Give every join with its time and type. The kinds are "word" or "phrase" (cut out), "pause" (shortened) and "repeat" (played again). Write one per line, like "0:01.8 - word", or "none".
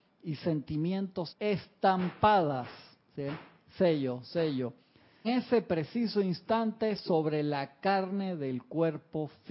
0:01.3 - word
0:04.2 - word
0:05.2 - word